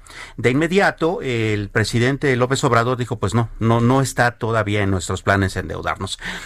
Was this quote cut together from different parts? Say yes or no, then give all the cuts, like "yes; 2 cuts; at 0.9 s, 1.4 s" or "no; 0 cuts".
no; 0 cuts